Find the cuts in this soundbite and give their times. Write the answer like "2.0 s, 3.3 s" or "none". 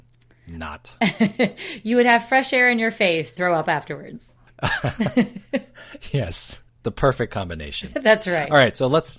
3.4 s, 6.7 s